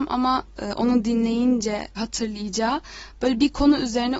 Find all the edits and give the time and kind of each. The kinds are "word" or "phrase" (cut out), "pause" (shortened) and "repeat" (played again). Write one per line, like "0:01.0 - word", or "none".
0:02.0 - word